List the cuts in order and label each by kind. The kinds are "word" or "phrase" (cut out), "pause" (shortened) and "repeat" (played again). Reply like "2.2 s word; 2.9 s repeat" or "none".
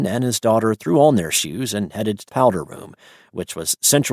2.3 s word